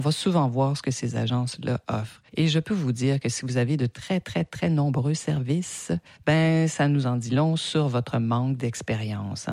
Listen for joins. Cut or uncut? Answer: cut